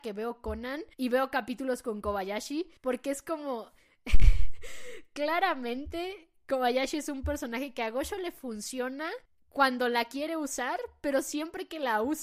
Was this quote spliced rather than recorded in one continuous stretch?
yes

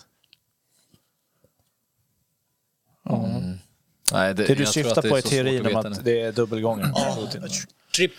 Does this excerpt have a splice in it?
no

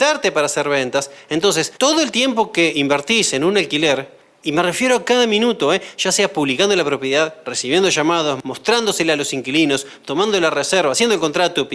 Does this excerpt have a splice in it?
yes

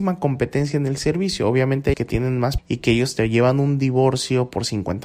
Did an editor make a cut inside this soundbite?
yes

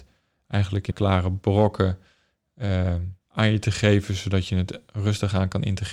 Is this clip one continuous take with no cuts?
no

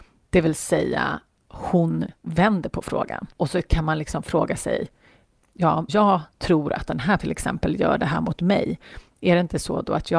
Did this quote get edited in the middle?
yes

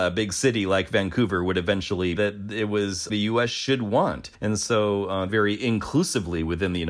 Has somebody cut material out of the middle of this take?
yes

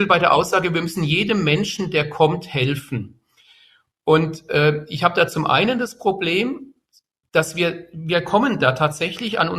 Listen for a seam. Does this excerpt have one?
no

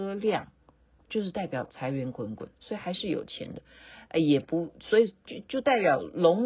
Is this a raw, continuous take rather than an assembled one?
yes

